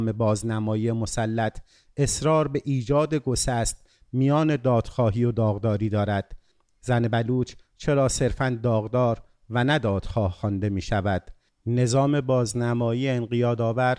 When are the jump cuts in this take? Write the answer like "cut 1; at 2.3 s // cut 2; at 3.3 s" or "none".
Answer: none